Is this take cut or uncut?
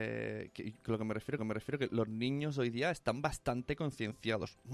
cut